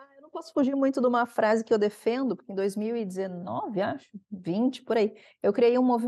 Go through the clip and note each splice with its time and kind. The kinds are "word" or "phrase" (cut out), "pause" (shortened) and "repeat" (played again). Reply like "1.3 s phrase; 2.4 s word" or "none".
none

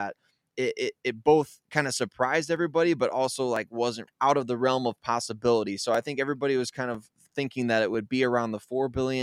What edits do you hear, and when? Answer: 4.1 s word

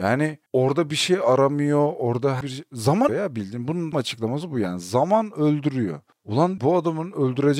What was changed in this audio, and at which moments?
2.4 s word; 3.1 s word; 3.9 s word; 6.6 s word

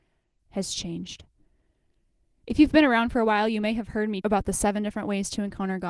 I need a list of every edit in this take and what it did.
4.2 s word

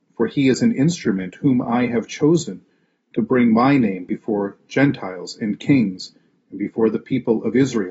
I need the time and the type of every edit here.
none

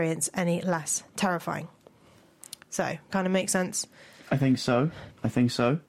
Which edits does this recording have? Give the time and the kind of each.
3.1 s word

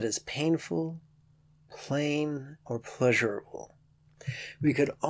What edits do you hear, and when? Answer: 2.6 s pause

